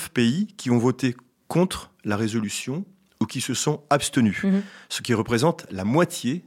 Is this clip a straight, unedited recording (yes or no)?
yes